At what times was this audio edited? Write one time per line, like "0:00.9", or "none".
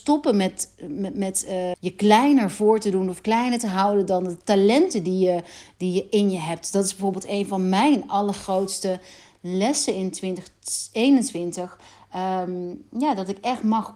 0:01.7